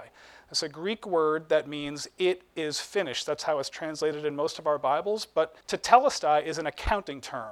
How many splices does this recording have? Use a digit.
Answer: 1